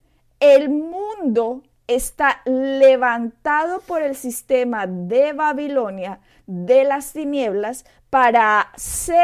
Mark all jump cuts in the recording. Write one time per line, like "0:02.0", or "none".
none

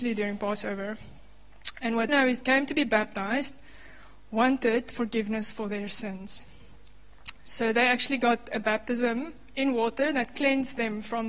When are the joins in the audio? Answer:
0:02.1
0:02.4

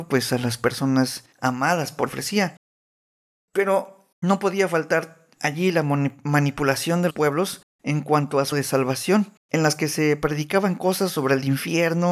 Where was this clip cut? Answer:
0:01.3
0:02.1
0:04.1
0:05.3
0:07.1
0:07.7
0:08.5
0:09.4

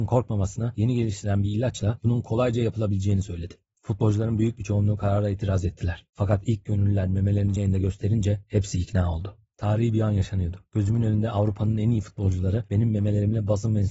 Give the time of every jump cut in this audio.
0:07.6

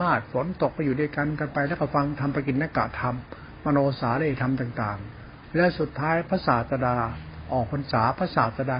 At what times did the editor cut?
none

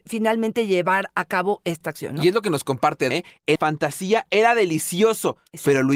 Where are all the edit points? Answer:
0:03.1
0:03.6

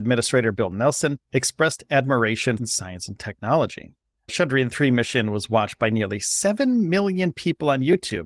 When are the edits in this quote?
0:01.2
0:02.6
0:04.0

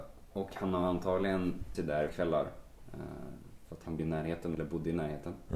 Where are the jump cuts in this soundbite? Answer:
0:01.7
0:02.1
0:04.0
0:04.5

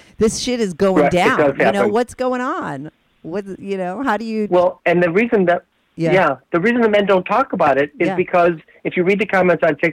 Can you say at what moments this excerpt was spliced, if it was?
none

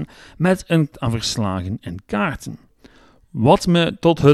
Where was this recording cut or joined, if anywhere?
0:00.9

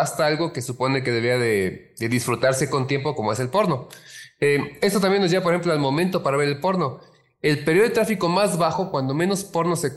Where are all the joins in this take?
none

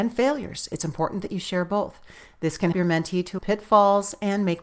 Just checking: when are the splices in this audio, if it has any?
0:02.7
0:03.4

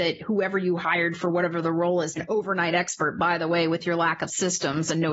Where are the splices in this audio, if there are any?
0:02.2

